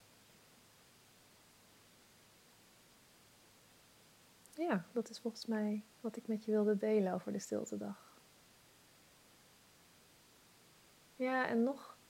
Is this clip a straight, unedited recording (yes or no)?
no